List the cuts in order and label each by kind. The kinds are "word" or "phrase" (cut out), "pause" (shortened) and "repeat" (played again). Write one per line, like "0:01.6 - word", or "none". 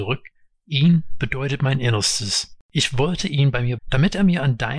0:01.2 - word
0:02.6 - pause
0:03.8 - word